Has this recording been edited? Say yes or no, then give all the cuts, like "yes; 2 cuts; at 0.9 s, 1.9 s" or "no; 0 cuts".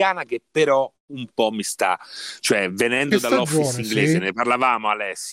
no; 0 cuts